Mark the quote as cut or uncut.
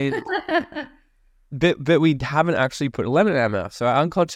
uncut